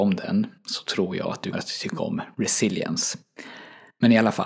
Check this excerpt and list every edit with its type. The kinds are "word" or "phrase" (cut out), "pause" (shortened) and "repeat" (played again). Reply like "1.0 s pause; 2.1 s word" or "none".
1.5 s word